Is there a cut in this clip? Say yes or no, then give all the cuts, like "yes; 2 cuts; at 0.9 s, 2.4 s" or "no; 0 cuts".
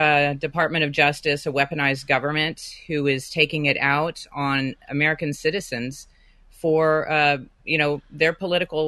no; 0 cuts